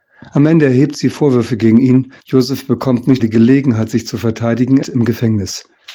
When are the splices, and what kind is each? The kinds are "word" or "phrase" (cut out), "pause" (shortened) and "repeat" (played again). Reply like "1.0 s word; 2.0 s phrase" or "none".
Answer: 1.1 s word; 2.2 s pause; 3.2 s word; 4.8 s word